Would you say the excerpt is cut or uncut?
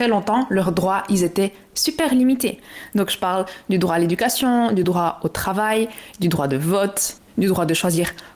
uncut